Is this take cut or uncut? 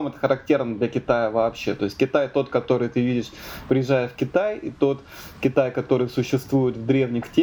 uncut